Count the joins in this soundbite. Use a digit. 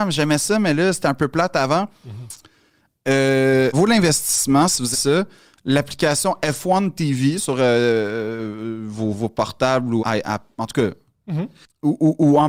5